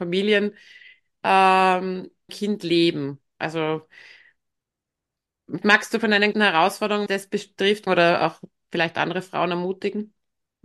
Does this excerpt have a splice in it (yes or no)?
yes